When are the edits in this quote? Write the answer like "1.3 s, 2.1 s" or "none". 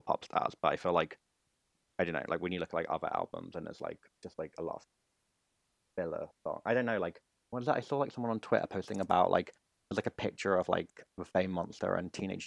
none